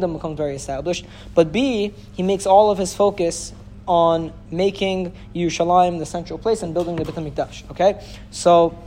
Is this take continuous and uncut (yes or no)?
yes